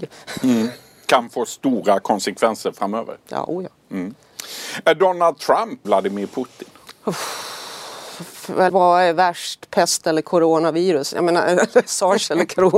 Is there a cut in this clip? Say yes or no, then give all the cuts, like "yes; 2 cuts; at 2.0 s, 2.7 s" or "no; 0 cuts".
yes; 2 cuts; at 5.8 s, 8.7 s